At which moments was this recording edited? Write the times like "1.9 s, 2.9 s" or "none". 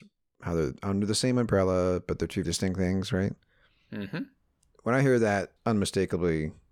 2.4 s, 5.6 s

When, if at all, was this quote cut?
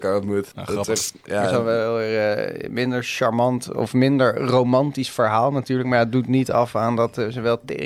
none

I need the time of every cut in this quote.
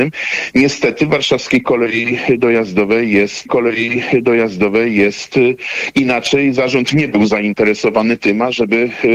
3.5 s

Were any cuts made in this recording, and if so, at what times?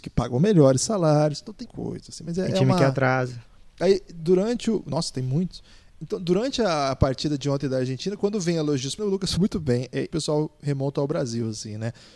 1.7 s, 9.0 s, 9.4 s, 10.1 s

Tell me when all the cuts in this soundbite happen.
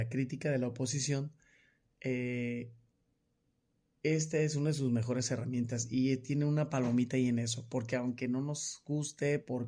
none

